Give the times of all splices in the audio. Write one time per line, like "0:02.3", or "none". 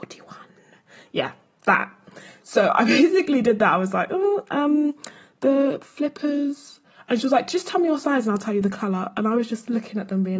none